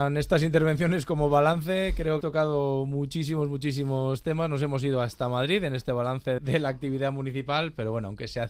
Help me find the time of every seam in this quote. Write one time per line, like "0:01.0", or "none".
0:02.2
0:06.4